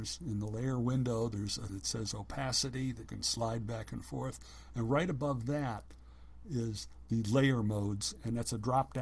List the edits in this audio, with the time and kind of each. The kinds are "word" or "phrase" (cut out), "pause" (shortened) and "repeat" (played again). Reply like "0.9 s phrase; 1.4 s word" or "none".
1.7 s word; 3.1 s word